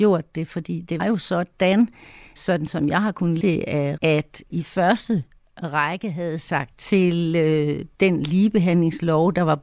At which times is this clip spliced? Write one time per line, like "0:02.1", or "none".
0:01.0
0:02.4
0:03.4
0:04.0
0:04.5
0:06.7